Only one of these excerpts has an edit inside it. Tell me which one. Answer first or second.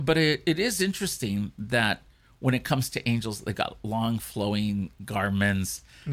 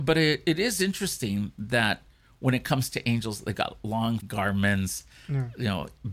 second